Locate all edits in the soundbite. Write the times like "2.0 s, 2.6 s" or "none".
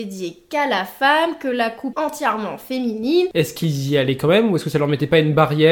1.9 s

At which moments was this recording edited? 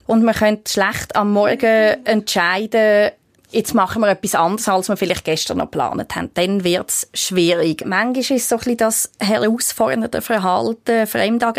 3.4 s

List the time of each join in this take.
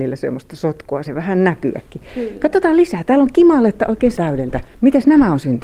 1.0 s, 4.1 s

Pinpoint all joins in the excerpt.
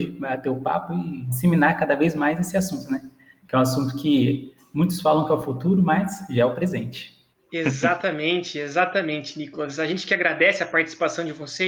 none

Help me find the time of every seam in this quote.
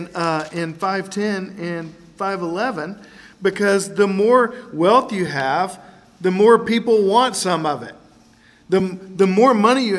none

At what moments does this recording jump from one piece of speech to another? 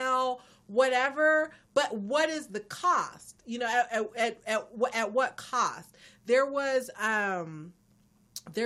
none

